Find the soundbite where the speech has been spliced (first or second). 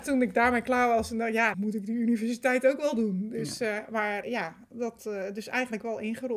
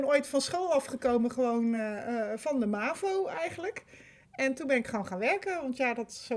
first